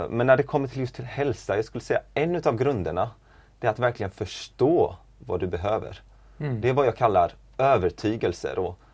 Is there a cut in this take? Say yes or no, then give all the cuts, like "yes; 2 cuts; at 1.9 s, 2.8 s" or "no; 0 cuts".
no; 0 cuts